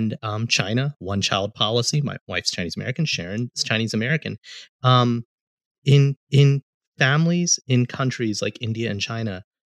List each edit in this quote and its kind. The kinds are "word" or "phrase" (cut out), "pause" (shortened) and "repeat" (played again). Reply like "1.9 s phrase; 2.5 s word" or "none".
6.3 s repeat